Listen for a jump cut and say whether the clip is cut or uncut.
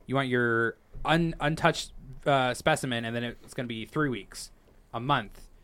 uncut